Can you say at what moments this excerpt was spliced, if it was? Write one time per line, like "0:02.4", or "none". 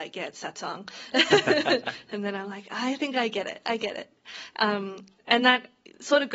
none